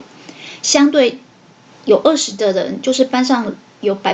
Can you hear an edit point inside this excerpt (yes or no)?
no